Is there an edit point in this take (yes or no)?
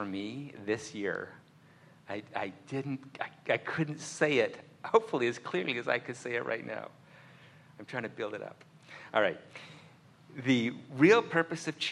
no